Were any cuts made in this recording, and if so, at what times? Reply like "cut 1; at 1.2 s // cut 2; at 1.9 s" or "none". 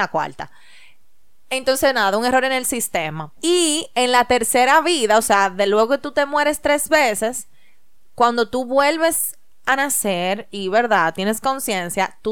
cut 1; at 3.4 s